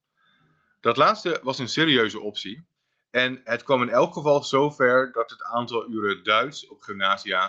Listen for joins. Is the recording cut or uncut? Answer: uncut